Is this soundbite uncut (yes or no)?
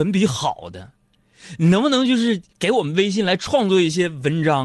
no